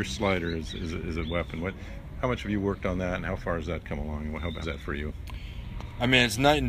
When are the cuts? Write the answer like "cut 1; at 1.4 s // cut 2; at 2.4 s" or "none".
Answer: cut 1; at 4.6 s